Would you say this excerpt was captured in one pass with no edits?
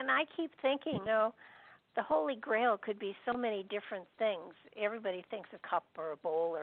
no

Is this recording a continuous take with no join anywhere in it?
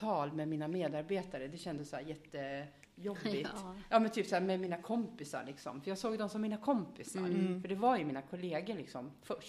yes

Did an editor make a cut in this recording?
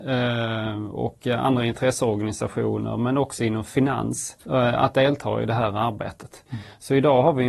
yes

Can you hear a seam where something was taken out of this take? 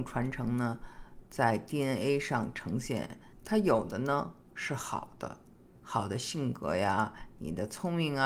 no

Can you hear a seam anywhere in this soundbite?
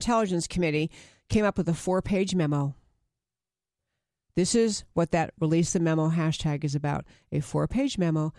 no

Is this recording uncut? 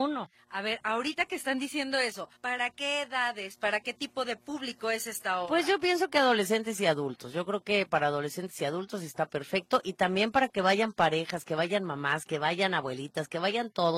no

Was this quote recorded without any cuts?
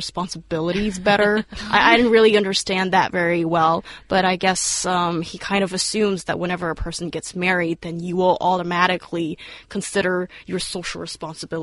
yes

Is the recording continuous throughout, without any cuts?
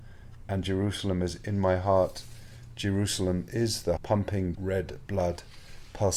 no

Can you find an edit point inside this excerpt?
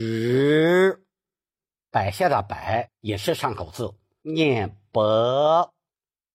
no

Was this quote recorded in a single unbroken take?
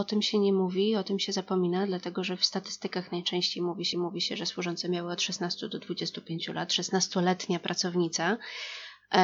no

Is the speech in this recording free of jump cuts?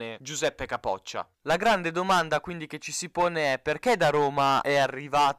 no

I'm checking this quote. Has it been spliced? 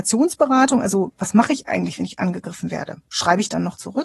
no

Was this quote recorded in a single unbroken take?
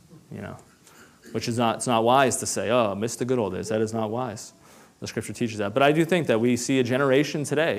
yes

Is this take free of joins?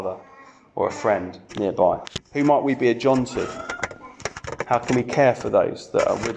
yes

